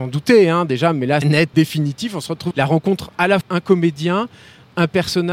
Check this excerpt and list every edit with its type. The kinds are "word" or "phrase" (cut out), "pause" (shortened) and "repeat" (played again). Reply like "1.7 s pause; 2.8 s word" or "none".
1.2 s phrase; 1.5 s word; 2.5 s word; 3.4 s phrase

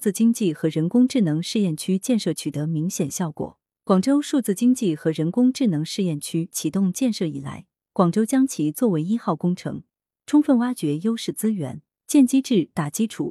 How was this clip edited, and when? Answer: none

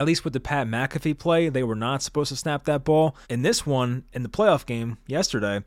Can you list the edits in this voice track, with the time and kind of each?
3.2 s pause

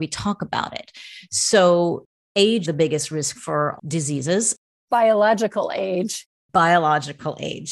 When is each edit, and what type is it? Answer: 2.6 s word; 3.3 s word; 3.8 s word

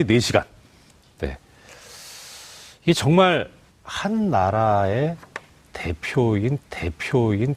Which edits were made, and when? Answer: 3.7 s pause; 6.6 s repeat

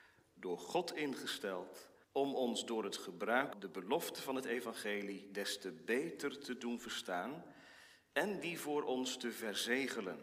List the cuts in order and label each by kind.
2.0 s pause; 3.5 s word

